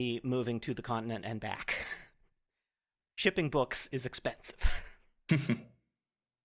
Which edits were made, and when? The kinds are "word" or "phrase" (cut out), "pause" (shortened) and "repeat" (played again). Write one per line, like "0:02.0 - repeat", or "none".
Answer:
none